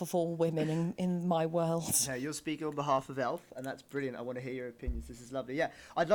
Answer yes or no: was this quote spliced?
no